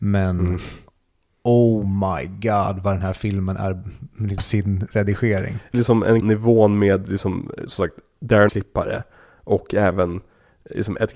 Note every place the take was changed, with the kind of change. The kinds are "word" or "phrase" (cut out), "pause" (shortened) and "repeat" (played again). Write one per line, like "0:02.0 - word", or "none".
0:04.4 - phrase
0:05.7 - phrase
0:06.2 - phrase
0:08.5 - word